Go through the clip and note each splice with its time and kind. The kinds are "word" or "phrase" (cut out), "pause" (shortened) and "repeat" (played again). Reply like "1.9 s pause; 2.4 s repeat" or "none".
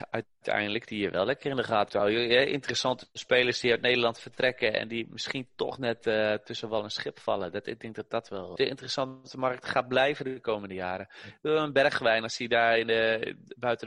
1.9 s word; 8.6 s phrase